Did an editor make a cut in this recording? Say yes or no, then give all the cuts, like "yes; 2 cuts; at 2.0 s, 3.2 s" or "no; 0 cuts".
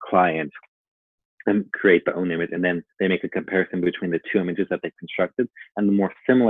no; 0 cuts